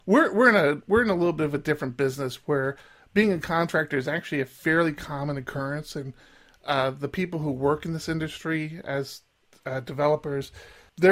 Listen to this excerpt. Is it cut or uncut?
uncut